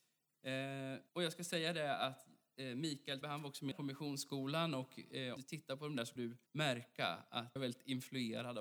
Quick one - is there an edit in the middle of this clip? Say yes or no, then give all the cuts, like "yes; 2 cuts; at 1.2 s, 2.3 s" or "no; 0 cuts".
yes; 7 cuts; at 1.1 s, 3.2 s, 3.7 s, 5.4 s, 6.2 s, 6.5 s, 7.6 s